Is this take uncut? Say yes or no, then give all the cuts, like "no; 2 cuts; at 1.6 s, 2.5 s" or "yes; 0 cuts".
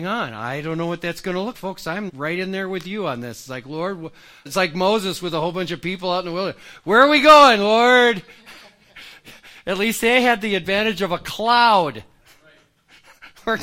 no; 3 cuts; at 1.5 s, 2.1 s, 4.5 s